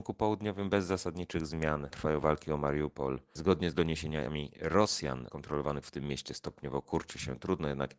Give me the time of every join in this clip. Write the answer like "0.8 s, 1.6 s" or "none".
1.9 s, 5.3 s, 5.8 s

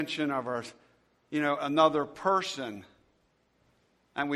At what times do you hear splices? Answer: none

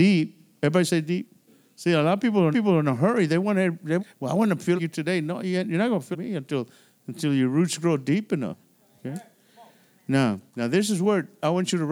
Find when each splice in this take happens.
1.5 s, 2.5 s, 4.0 s, 4.8 s, 6.1 s, 10.5 s

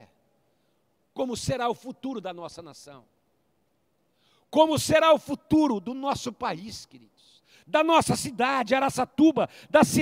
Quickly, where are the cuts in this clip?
none

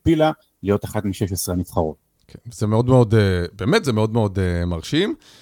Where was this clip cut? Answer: none

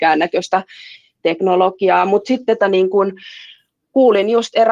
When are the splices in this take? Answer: 2.6 s

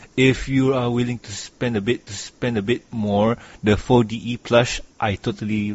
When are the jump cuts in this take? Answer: 2.1 s

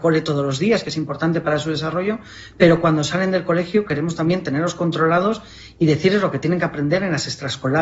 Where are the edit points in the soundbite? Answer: none

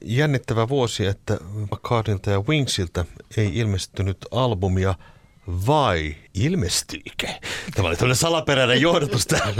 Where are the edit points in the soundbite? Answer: 1.7 s, 6.3 s

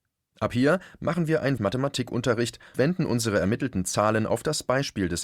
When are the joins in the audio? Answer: 1.6 s, 2.7 s

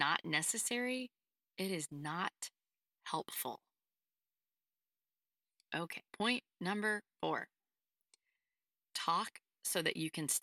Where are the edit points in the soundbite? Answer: 6.1 s

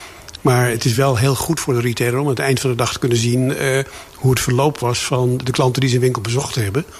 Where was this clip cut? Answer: none

